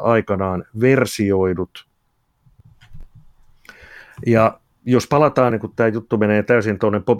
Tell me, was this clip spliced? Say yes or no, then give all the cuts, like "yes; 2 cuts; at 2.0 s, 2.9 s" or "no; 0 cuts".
yes; 1 cut; at 5.5 s